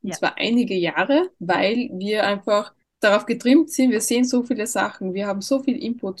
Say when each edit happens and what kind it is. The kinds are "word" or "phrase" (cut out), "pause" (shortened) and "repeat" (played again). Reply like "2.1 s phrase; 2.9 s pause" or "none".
1.3 s pause; 2.8 s pause